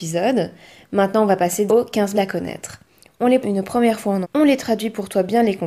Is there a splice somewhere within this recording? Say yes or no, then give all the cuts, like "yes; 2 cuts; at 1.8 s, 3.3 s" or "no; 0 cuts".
yes; 4 cuts; at 1.7 s, 2.1 s, 3.4 s, 4.2 s